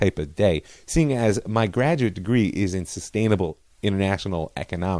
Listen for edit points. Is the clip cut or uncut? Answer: uncut